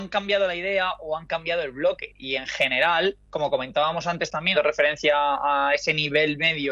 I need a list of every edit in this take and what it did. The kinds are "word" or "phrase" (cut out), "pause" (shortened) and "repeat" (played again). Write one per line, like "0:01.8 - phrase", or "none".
0:03.2 - pause
0:04.5 - word